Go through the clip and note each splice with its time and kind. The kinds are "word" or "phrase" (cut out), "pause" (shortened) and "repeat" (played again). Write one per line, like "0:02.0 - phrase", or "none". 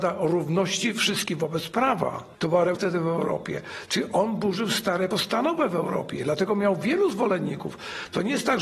0:02.7 - word
0:05.1 - word